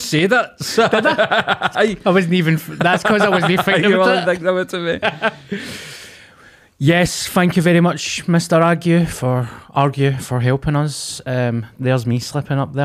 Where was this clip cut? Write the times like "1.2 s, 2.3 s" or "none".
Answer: 11.8 s

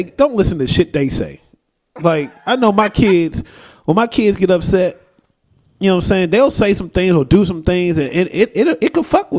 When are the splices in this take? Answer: none

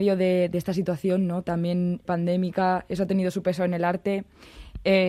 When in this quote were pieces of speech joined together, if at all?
2.0 s

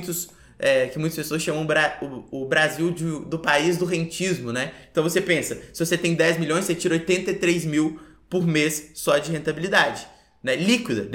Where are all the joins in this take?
none

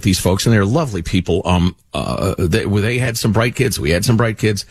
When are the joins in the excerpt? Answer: none

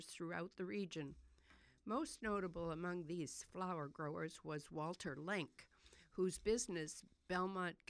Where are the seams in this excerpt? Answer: none

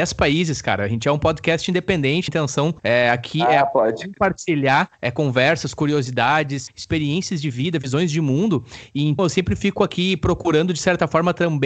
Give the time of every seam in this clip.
2.3 s, 2.8 s, 4.9 s, 9.2 s

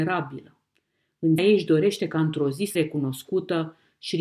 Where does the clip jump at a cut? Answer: 1.4 s, 2.7 s

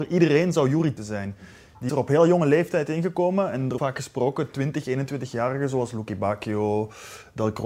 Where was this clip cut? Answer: 1.0 s, 1.9 s, 3.8 s

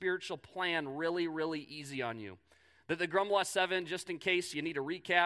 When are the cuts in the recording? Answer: none

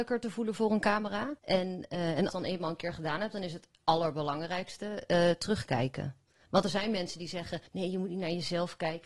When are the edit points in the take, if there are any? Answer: 1.4 s, 2.3 s, 7.7 s

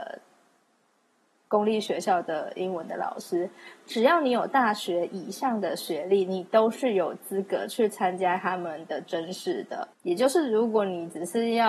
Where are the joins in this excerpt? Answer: 9.9 s

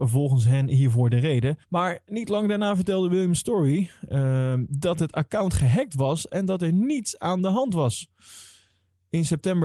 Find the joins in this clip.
1.6 s

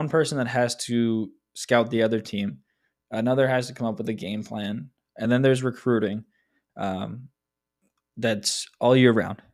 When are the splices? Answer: none

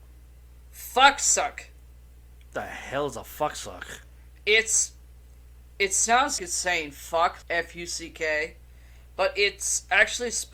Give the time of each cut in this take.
6.4 s, 7.4 s

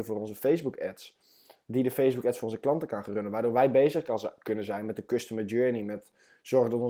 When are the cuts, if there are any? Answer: none

